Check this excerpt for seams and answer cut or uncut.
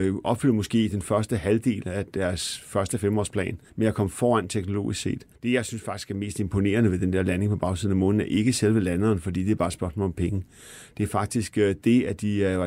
cut